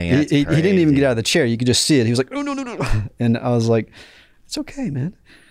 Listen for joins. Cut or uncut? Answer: uncut